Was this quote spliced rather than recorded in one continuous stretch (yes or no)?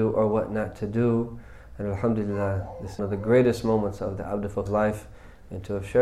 yes